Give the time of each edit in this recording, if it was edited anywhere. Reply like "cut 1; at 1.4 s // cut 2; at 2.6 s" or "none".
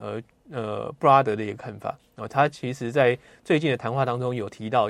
none